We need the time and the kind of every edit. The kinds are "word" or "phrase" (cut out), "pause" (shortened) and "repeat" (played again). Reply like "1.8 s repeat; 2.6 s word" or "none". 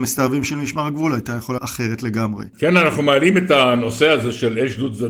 1.6 s word